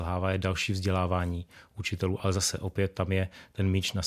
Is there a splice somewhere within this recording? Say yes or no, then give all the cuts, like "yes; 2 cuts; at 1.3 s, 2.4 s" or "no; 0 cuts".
no; 0 cuts